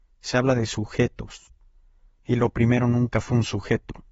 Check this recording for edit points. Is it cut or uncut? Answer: uncut